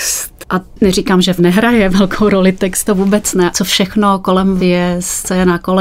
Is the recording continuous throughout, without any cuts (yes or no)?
no